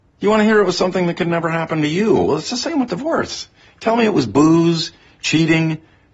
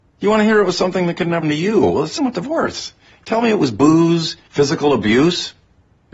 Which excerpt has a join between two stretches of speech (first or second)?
second